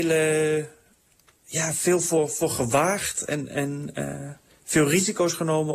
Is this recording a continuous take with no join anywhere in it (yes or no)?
yes